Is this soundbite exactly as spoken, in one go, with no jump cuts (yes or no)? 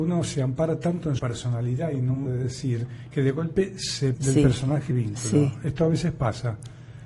no